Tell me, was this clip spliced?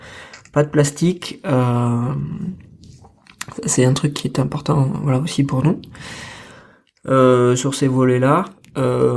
no; 0 cuts

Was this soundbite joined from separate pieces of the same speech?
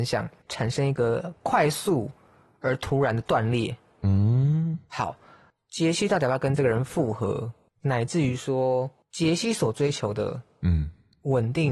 no; 0 cuts

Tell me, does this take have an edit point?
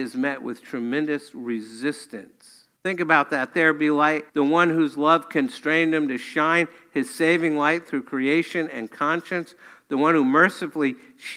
yes; 3 cuts; at 2.8 s, 3.5 s, 4.3 s

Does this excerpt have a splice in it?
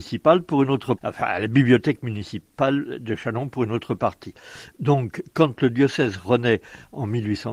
yes; 1 cut; at 1.0 s

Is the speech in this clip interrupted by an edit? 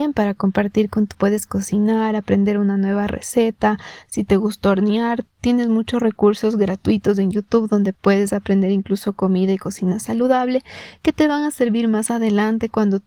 yes; 1 cut; at 1.1 s

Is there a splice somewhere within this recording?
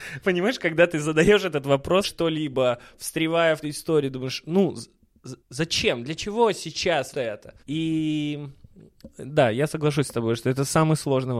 yes; 5 cuts; at 2.0 s, 3.6 s, 5.4 s, 7.1 s, 7.6 s

